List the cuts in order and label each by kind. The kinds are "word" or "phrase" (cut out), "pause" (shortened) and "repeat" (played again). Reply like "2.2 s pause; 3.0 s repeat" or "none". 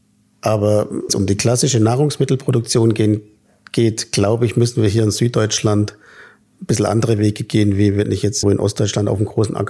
1.1 s word; 8.4 s word